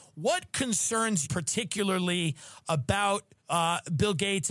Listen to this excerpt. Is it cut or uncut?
cut